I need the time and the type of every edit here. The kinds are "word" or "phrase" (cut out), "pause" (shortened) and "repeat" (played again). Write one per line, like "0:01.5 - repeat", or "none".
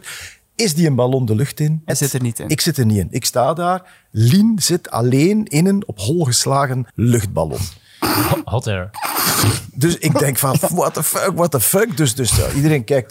0:01.9 - word
0:06.9 - pause